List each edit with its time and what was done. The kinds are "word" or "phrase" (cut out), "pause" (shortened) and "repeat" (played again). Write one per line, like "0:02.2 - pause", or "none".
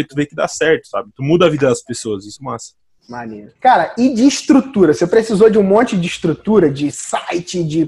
0:02.4 - word
0:03.6 - pause